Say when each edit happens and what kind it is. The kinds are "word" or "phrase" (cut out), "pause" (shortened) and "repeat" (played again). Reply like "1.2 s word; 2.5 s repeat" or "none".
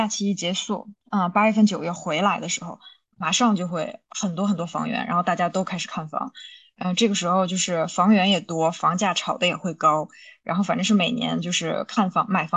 none